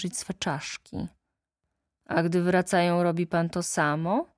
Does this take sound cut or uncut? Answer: uncut